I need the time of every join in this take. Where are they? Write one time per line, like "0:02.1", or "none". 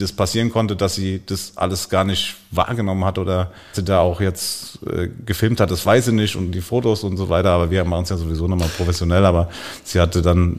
0:03.7